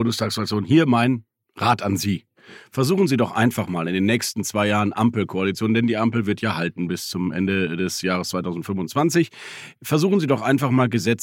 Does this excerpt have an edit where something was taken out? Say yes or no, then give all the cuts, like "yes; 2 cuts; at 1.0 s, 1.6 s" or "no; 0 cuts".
no; 0 cuts